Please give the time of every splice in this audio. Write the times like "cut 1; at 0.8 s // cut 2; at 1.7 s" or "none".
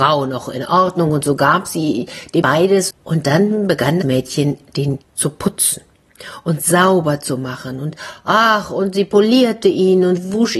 cut 1; at 2.4 s // cut 2; at 2.9 s // cut 3; at 4.0 s // cut 4; at 5.0 s